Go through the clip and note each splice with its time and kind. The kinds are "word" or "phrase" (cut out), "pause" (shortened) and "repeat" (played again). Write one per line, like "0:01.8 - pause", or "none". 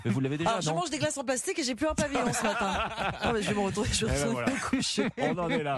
none